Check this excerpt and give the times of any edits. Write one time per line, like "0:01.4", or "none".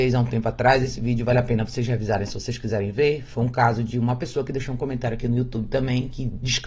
none

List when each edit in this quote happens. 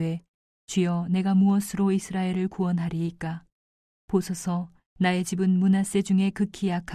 none

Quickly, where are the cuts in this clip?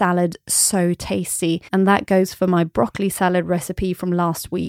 0:01.7

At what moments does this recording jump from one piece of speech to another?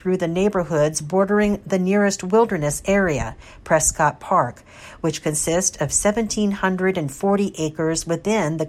none

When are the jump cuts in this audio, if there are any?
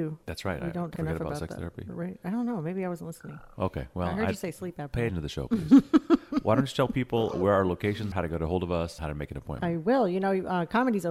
0:01.0
0:05.1
0:07.3
0:08.1
0:09.0

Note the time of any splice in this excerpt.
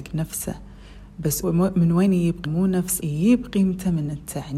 0:01.4
0:02.4
0:03.0

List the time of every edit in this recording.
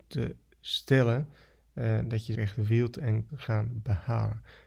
0:02.3
0:03.3

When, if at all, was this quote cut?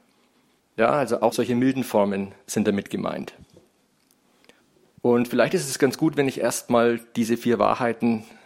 0:01.3

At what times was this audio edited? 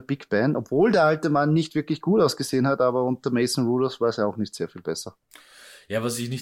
none

